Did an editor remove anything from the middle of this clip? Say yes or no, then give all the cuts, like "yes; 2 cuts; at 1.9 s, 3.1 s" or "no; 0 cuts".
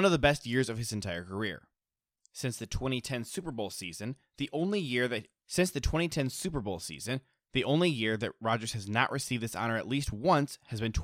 no; 0 cuts